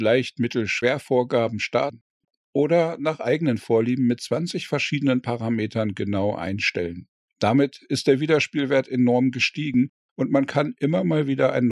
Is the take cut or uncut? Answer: uncut